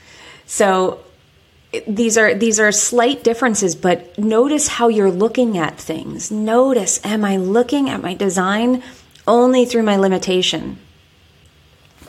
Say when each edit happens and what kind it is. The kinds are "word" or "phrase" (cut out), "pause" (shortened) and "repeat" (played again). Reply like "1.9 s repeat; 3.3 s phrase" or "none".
none